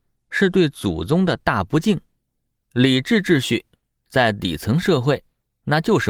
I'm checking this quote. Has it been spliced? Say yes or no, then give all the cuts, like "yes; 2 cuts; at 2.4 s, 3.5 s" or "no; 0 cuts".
yes; 1 cut; at 2.3 s